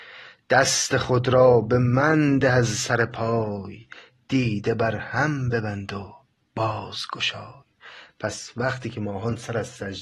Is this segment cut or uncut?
uncut